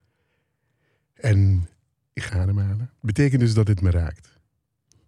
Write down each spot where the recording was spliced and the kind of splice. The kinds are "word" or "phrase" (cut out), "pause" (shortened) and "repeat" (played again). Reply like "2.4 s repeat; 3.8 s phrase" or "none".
2.3 s word; 3.0 s pause